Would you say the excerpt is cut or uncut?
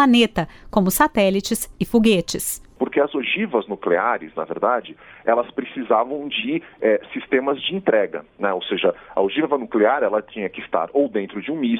uncut